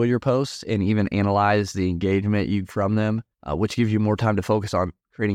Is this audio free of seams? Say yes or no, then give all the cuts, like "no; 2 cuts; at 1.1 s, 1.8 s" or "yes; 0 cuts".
no; 2 cuts; at 2.6 s, 3.3 s